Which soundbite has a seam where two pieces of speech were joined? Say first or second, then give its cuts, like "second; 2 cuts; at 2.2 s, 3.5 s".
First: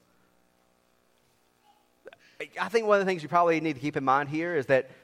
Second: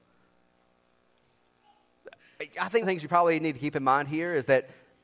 second; 1 cut; at 2.8 s